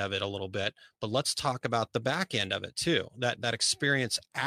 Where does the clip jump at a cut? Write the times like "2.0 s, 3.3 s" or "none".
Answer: none